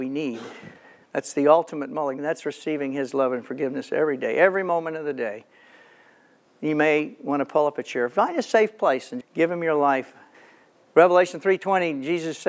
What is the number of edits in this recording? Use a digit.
2